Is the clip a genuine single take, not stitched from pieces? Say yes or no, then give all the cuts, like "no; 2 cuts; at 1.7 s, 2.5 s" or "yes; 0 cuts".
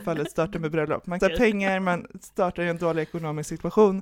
no; 1 cut; at 1.2 s